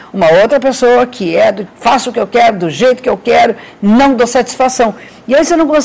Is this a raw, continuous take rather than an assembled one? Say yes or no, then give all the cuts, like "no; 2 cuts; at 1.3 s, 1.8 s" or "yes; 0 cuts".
no; 1 cut; at 1.7 s